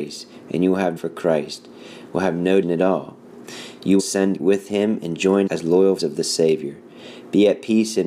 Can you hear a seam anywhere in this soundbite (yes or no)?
yes